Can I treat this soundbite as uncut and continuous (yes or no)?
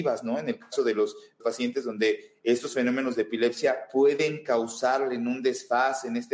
no